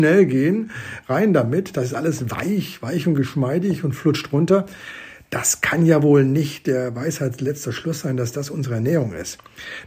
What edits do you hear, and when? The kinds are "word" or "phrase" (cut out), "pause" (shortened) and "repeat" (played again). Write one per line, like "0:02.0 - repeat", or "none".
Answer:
none